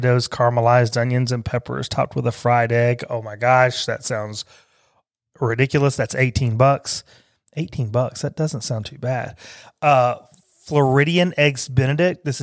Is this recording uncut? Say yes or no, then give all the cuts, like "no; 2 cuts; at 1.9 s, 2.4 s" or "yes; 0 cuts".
yes; 0 cuts